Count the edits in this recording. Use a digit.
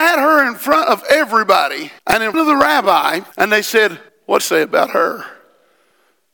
5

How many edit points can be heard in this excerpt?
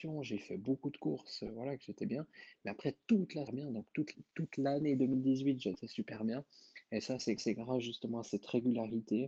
3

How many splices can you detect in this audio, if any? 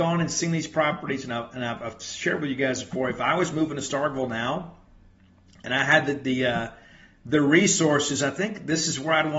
0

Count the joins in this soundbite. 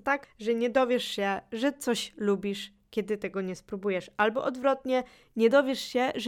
0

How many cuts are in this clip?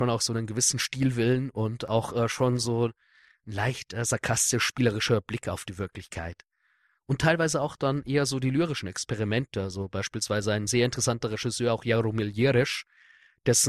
0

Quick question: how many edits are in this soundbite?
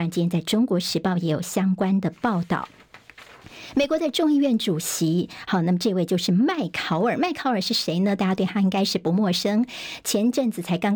0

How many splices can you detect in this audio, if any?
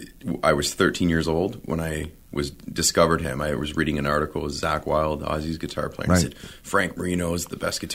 1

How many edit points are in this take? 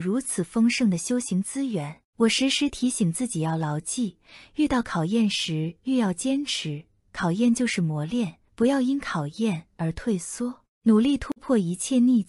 2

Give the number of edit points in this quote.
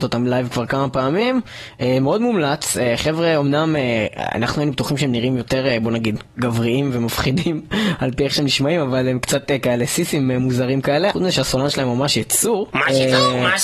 0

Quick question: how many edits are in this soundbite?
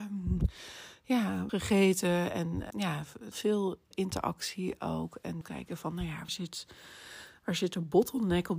6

